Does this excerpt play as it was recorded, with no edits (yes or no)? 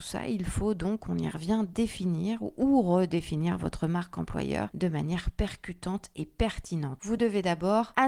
yes